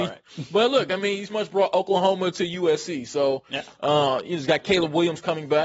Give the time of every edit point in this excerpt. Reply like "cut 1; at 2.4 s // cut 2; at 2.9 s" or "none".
cut 1; at 1.3 s